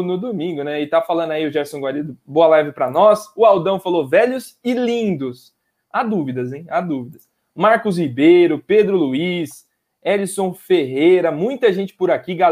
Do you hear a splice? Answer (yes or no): no